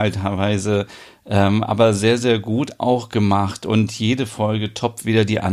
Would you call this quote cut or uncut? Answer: uncut